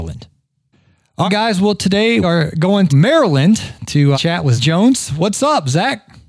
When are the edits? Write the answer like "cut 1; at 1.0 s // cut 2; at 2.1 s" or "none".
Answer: cut 1; at 1.3 s // cut 2; at 2.2 s // cut 3; at 2.9 s // cut 4; at 4.1 s // cut 5; at 4.6 s